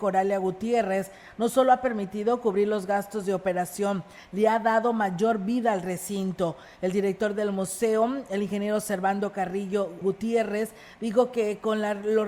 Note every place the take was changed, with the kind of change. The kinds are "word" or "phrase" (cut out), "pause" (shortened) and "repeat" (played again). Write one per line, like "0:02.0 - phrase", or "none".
0:10.0 - word